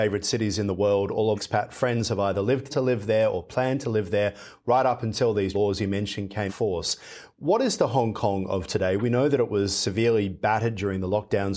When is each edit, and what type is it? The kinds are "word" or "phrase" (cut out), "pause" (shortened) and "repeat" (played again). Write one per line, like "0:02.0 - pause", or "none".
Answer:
0:01.4 - word
0:02.7 - phrase
0:05.5 - word
0:06.5 - word

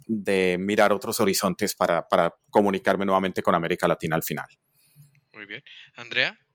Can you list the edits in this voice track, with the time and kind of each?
none

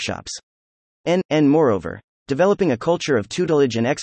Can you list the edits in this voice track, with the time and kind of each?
none

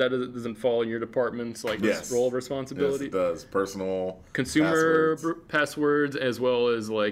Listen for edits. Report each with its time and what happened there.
none

